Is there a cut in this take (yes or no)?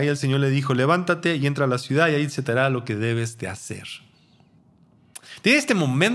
no